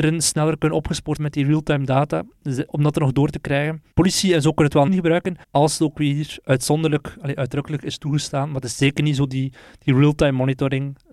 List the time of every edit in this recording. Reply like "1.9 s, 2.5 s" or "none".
1.2 s, 2.7 s, 3.9 s, 4.9 s, 5.4 s